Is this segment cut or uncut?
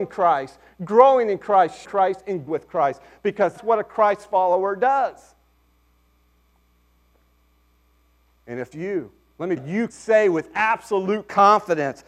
cut